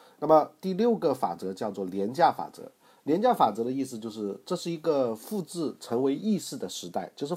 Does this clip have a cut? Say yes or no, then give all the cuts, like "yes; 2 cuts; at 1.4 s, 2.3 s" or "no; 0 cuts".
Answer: no; 0 cuts